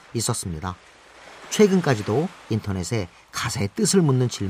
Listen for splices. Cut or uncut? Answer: uncut